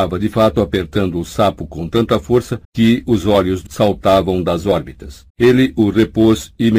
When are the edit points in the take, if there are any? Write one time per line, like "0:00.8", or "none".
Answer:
0:02.6
0:03.7
0:05.3